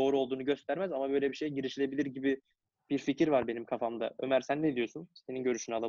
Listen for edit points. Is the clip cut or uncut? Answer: uncut